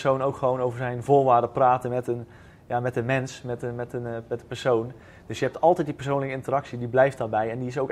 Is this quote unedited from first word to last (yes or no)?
yes